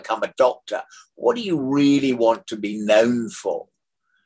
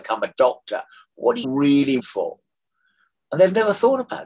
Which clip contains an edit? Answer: second; 2 cuts; at 1.4 s, 2.0 s

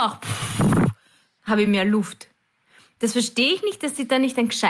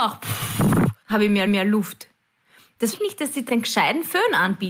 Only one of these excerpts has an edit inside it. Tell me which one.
second; 4 cuts; at 1.0 s, 1.5 s, 2.9 s, 3.5 s

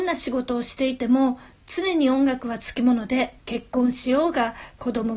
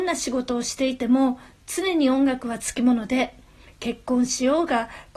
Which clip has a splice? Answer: first; 1 cut; at 3.4 s

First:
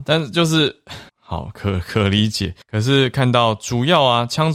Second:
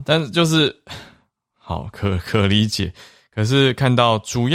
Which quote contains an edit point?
first; 2 cuts; at 1.1 s, 2.6 s

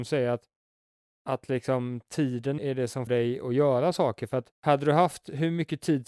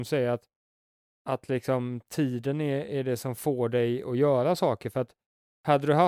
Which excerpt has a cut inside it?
first; 3 cuts; at 2.6 s, 3.1 s, 4.5 s

